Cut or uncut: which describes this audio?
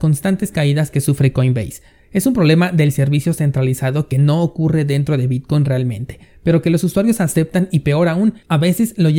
uncut